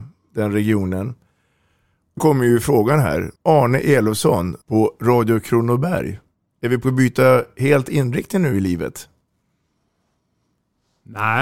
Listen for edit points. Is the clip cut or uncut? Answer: cut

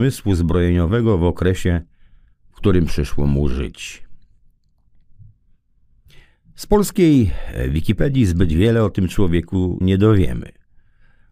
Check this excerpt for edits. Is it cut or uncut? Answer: cut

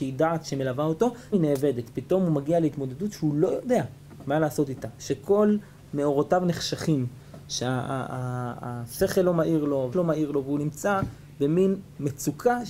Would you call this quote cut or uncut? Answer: cut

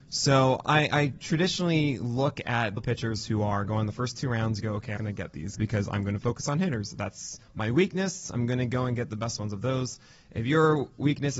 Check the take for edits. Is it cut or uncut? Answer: cut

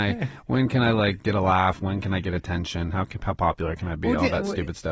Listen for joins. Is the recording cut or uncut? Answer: uncut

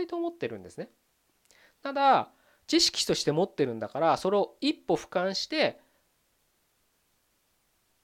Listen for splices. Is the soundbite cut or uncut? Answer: uncut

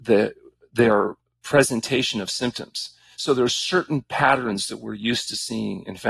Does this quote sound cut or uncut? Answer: uncut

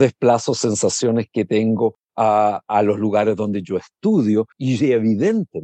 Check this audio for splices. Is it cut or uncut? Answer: cut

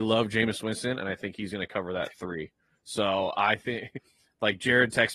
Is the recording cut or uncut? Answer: uncut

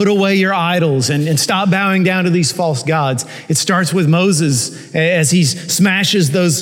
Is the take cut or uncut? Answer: uncut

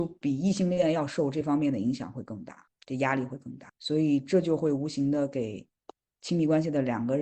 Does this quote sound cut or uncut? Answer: uncut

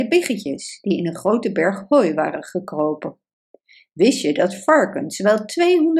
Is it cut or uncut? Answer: uncut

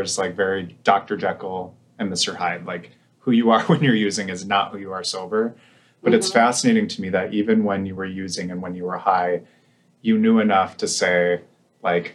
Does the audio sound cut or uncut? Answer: uncut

